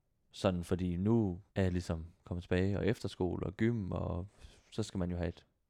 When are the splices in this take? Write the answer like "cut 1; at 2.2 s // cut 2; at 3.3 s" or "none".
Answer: cut 1; at 1.5 s

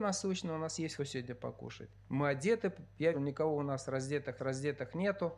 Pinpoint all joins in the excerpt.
cut 1; at 1.0 s // cut 2; at 2.0 s // cut 3; at 3.1 s // cut 4; at 4.4 s

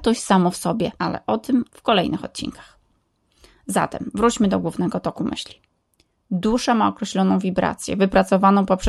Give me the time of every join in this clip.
cut 1; at 1.0 s // cut 2; at 1.7 s

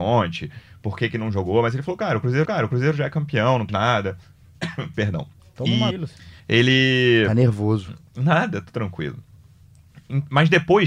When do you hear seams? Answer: cut 1; at 2.4 s // cut 2; at 3.7 s // cut 3; at 5.4 s // cut 4; at 5.9 s // cut 5; at 6.4 s

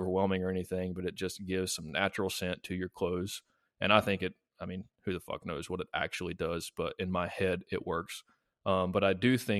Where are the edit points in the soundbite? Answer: none

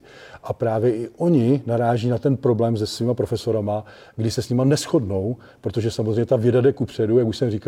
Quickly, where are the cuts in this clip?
none

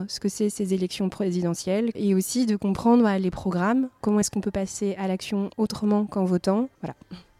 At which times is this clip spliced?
none

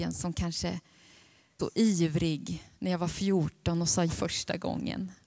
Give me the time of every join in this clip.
cut 1; at 1.6 s // cut 2; at 4.1 s

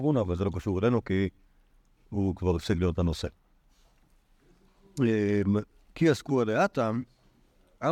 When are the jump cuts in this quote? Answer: none

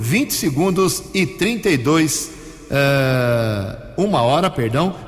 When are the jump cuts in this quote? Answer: none

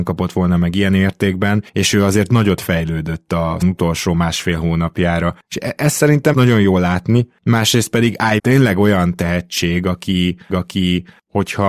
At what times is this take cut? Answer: cut 1; at 1.7 s // cut 2; at 3.6 s // cut 3; at 6.3 s // cut 4; at 8.4 s // cut 5; at 10.5 s

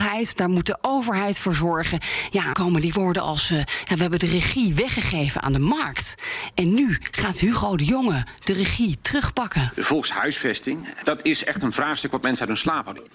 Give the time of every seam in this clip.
cut 1; at 2.5 s

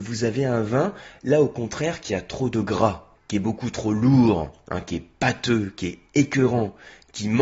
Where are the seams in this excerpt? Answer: cut 1; at 3.2 s

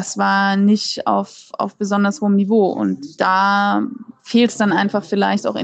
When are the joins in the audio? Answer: none

